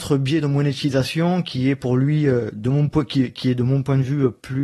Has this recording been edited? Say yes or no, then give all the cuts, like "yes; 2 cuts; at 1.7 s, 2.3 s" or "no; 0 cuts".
no; 0 cuts